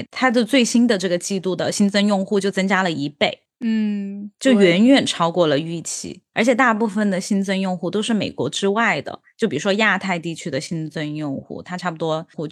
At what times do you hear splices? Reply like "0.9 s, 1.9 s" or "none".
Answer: 6.3 s